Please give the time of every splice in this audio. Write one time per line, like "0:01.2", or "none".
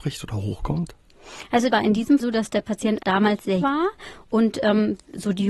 0:01.7
0:02.2
0:03.0
0:03.6